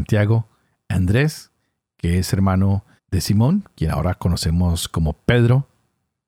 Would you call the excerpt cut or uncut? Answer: cut